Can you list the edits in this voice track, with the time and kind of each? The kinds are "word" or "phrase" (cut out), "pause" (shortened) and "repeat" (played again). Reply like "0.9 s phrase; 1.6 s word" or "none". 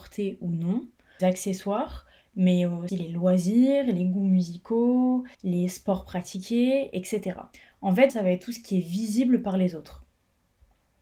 1.2 s word; 2.9 s phrase; 5.3 s pause; 7.5 s pause; 8.1 s word